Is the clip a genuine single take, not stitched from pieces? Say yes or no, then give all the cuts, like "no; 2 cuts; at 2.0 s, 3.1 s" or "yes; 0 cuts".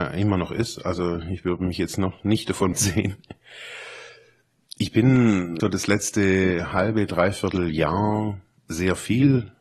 no; 2 cuts; at 2.7 s, 5.6 s